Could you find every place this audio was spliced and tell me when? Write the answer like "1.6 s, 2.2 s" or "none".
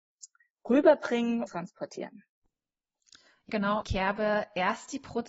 1.5 s, 3.5 s, 3.8 s